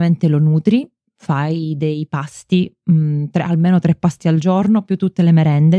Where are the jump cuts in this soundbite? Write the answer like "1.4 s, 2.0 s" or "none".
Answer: none